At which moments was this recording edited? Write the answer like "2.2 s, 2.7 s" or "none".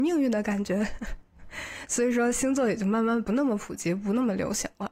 1.3 s

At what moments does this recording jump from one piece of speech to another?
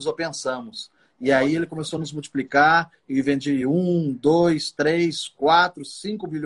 none

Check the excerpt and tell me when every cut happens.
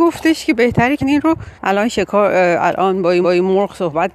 1.0 s, 1.6 s, 3.2 s

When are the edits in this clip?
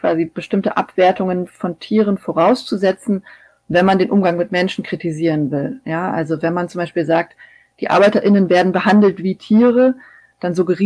none

